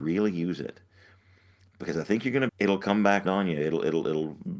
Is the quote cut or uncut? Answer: cut